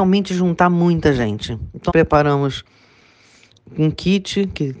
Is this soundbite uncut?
no; 1 cut; at 1.9 s

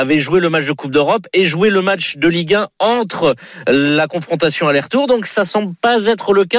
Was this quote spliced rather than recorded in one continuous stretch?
no; 0 cuts

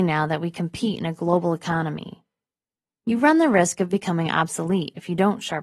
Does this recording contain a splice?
no; 0 cuts

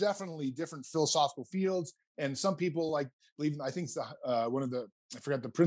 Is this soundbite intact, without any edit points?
yes; 0 cuts

